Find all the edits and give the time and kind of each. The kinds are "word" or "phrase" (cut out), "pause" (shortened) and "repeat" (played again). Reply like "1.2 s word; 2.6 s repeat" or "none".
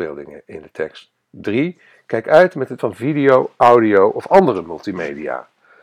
2.8 s word